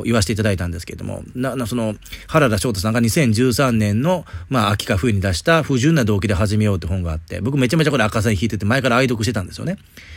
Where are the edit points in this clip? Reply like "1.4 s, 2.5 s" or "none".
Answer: none